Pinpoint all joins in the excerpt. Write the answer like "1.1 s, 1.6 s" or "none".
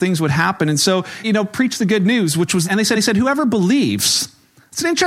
1.2 s, 2.6 s, 2.9 s